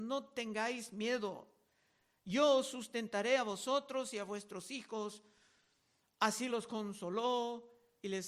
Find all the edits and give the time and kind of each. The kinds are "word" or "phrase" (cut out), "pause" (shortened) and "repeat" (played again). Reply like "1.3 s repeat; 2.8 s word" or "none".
none

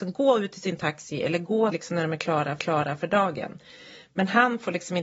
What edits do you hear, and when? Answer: 1.7 s word; 2.6 s repeat

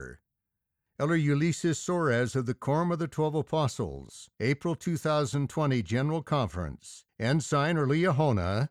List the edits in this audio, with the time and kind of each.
4.3 s pause; 7.1 s pause

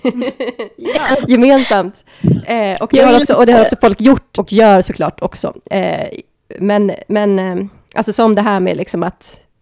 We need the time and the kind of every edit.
4.3 s word

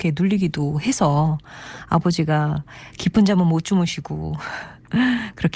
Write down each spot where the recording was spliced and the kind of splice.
none

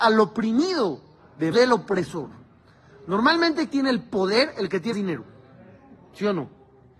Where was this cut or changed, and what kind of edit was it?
1.5 s word; 3.7 s word; 4.9 s word

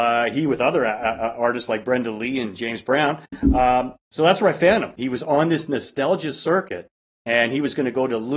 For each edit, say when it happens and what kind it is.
none

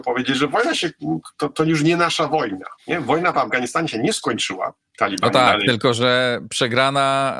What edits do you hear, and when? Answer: 2.8 s pause

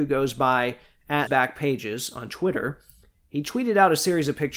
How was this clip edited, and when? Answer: 1.3 s word

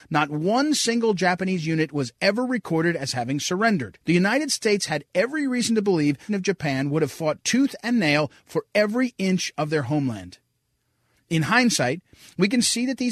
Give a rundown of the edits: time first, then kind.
4.0 s pause; 6.3 s phrase

